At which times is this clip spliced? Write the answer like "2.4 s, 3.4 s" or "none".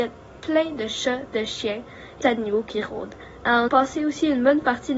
2.2 s, 3.7 s